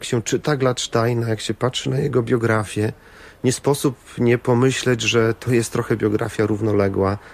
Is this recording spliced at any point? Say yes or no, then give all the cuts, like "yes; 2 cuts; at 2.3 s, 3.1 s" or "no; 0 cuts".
no; 0 cuts